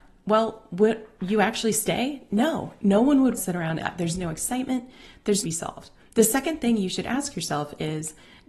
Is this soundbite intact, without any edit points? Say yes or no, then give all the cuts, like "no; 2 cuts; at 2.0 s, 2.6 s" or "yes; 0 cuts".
no; 4 cuts; at 3.4 s, 3.8 s, 5.4 s, 6.0 s